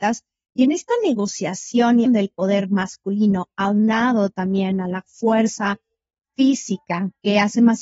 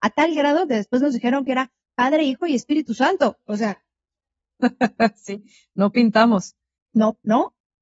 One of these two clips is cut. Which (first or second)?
first